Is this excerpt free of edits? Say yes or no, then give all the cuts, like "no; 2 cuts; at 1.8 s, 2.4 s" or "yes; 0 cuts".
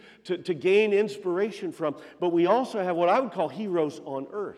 yes; 0 cuts